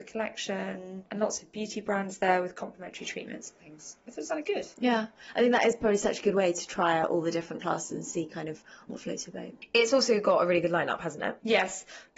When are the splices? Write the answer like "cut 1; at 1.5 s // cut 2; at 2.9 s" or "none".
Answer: none